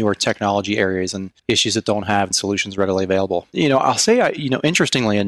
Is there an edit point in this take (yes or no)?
yes